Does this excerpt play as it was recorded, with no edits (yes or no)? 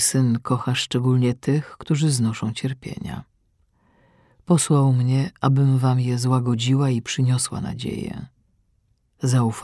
yes